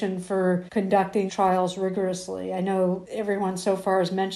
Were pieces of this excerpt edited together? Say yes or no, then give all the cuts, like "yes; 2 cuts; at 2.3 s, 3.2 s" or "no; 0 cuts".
yes; 1 cut; at 1.3 s